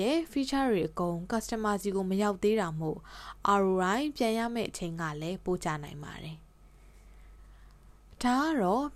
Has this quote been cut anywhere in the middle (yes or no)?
no